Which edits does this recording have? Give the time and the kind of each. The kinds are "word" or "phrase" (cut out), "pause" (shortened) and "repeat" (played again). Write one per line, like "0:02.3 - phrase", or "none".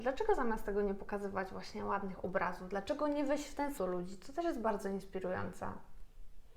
0:03.8 - word